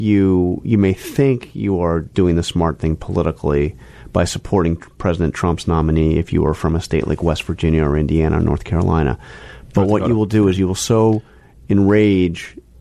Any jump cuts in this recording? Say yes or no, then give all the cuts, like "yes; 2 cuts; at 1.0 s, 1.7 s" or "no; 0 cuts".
no; 0 cuts